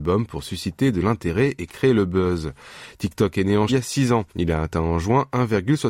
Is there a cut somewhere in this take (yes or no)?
yes